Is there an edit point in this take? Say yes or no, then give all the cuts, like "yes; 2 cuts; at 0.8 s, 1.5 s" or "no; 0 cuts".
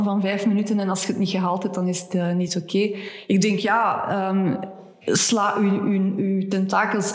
no; 0 cuts